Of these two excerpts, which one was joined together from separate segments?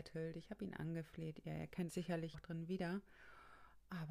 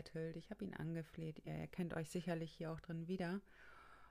first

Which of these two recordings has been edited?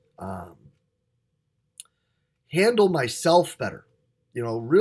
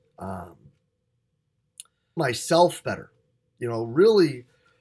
second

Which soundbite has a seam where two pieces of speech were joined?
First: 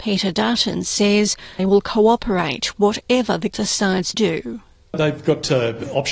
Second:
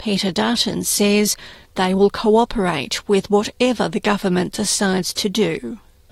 first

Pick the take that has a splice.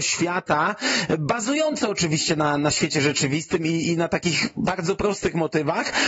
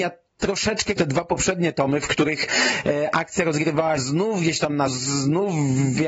second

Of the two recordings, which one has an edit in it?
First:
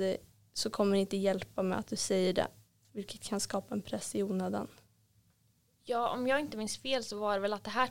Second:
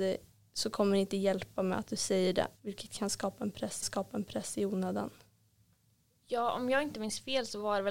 second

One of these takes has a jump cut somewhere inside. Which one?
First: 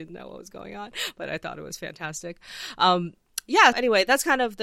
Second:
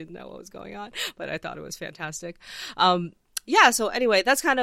first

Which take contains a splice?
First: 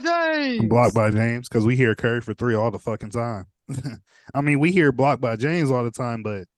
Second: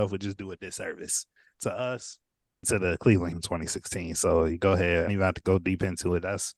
second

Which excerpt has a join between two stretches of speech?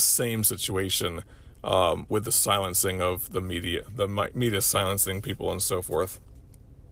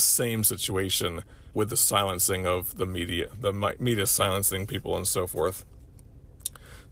second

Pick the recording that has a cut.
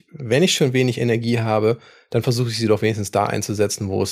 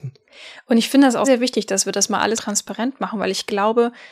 second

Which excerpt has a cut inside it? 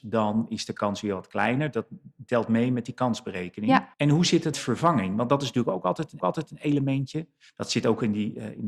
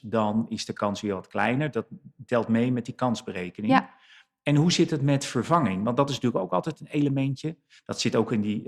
first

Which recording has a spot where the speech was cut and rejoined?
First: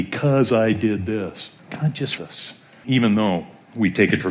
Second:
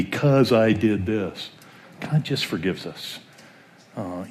first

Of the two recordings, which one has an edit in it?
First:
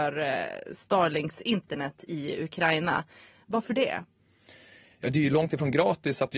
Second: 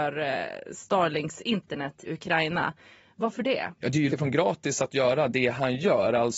second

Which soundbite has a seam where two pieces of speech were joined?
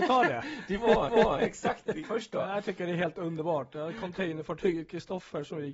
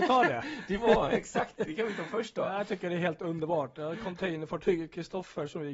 first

